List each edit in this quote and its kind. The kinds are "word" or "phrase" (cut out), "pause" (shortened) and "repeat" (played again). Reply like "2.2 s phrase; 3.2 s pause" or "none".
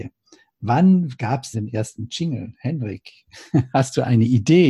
1.5 s word